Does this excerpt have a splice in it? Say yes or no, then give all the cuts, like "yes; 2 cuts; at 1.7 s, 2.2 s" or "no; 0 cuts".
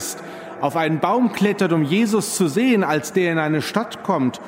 no; 0 cuts